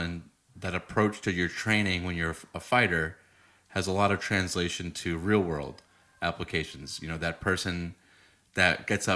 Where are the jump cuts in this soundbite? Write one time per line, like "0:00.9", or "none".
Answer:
none